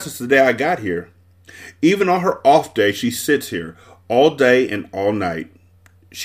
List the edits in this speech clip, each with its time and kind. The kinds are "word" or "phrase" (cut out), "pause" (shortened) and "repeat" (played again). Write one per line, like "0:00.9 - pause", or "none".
none